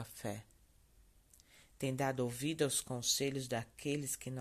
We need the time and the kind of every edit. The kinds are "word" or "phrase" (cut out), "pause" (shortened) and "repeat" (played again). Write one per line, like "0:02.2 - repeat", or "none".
none